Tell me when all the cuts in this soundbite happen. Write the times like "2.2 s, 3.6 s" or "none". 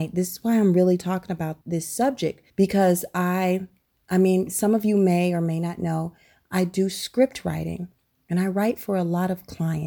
1.6 s, 2.5 s

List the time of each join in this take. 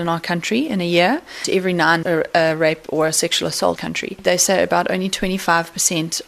2.0 s, 3.8 s

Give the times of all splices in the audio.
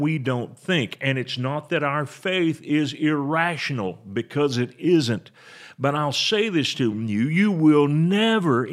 none

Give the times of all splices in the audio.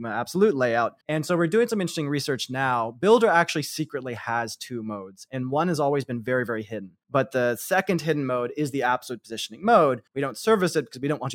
1.0 s, 7.0 s, 10.1 s

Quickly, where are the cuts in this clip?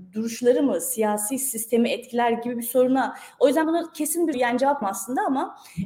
3.6 s, 4.3 s, 4.8 s

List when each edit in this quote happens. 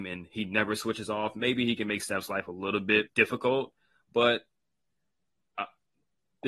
3.1 s

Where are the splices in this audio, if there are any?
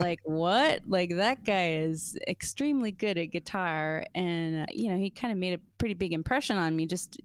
4.7 s, 5.7 s

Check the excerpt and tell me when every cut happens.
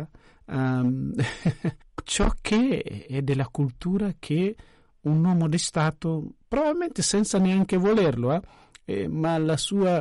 none

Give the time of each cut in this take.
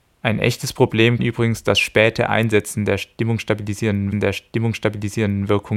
1.2 s, 4.1 s

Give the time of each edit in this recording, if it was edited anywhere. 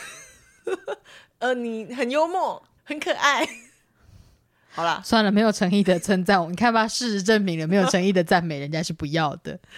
2.8 s

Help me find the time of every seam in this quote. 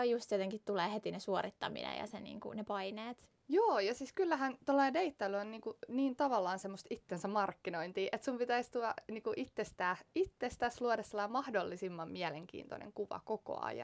none

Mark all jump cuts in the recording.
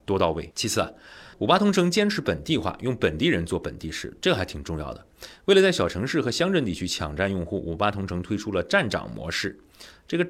1.3 s

